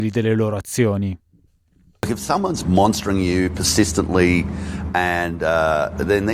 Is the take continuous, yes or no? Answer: yes